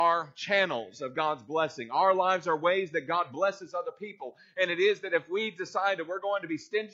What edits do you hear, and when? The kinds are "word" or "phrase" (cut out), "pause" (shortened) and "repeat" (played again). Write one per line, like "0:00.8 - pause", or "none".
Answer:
none